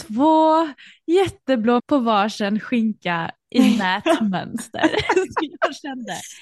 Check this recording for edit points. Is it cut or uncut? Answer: cut